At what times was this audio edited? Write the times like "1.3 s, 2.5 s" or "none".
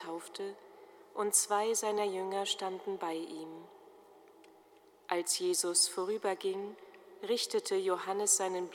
none